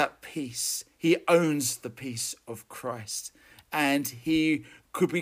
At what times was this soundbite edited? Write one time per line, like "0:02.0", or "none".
none

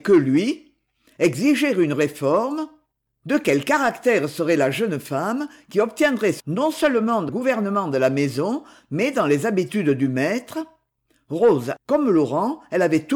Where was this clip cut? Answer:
0:06.4
0:07.3
0:11.8

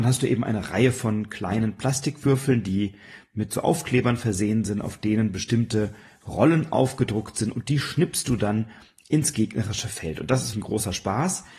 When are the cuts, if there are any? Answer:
0:10.5

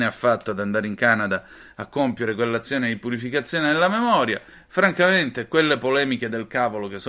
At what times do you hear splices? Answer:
none

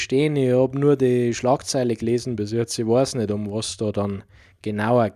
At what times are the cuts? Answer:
none

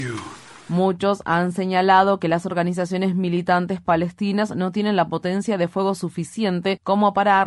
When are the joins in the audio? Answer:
none

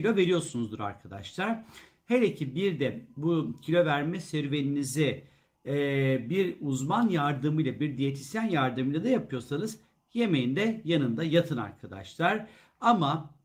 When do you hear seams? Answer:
none

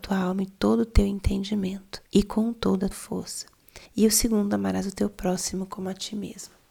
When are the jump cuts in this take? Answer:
0:02.1
0:02.9
0:03.9

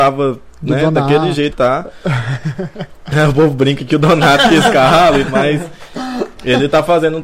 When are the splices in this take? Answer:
0:01.5
0:05.3

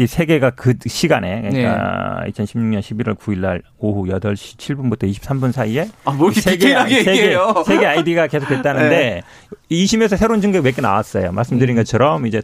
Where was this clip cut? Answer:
none

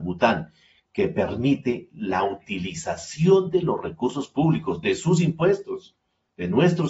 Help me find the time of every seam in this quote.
none

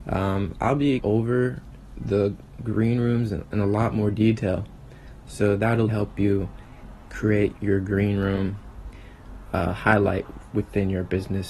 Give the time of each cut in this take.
0:01.0
0:05.9
0:07.6

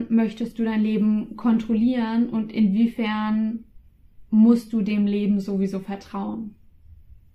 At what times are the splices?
none

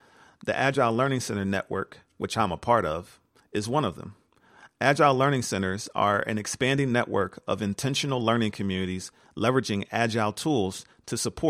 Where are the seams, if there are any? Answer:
none

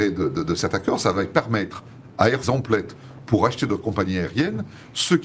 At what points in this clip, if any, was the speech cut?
0:02.4

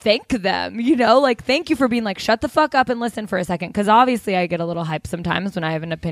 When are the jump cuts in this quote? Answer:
none

